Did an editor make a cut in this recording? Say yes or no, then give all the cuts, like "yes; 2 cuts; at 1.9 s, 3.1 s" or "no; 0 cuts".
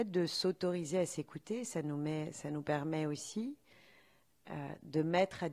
no; 0 cuts